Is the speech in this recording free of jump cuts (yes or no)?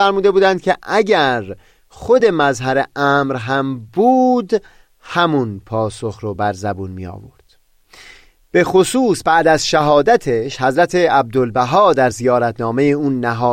yes